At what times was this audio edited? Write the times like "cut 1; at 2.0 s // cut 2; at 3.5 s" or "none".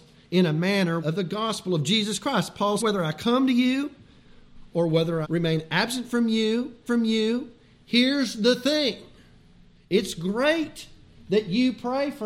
cut 1; at 1.0 s // cut 2; at 2.8 s // cut 3; at 5.2 s // cut 4; at 6.9 s